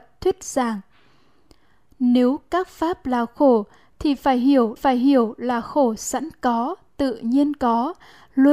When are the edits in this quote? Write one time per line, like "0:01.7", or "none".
0:04.8